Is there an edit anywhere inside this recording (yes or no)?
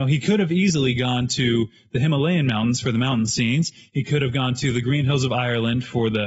no